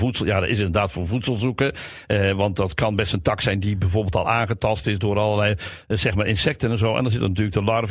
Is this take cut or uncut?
uncut